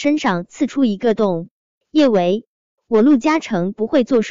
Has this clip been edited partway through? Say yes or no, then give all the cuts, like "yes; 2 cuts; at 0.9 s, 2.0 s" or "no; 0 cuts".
no; 0 cuts